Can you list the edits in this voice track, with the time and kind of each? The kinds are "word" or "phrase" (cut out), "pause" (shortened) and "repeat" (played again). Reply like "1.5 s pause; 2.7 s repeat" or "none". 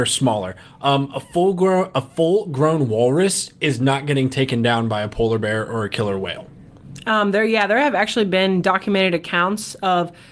none